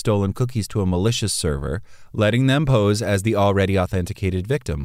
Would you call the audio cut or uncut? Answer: uncut